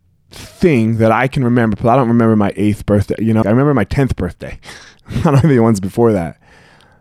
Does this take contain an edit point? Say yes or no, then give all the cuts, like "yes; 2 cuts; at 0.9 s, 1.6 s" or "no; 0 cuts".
yes; 2 cuts; at 3.4 s, 5.4 s